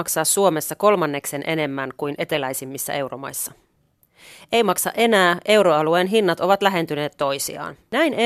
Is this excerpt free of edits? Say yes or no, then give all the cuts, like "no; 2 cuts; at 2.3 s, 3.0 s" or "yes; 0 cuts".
yes; 0 cuts